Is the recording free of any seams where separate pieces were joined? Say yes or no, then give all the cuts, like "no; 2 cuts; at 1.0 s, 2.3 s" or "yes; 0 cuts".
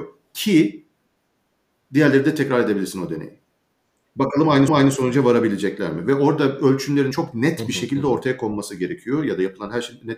no; 2 cuts; at 4.7 s, 7.1 s